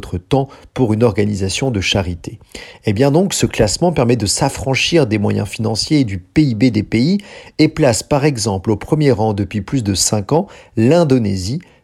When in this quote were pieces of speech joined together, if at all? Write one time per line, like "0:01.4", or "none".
none